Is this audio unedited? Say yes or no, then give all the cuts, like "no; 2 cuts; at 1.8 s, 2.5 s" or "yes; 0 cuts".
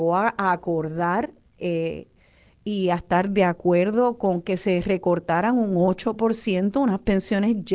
yes; 0 cuts